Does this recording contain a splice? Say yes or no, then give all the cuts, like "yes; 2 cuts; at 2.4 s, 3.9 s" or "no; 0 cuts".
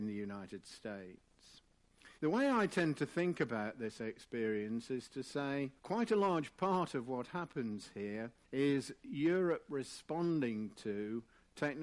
yes; 3 cuts; at 2.2 s, 5.8 s, 8.4 s